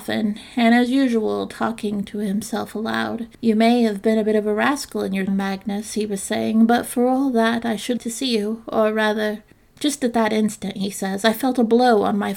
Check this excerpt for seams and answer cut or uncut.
cut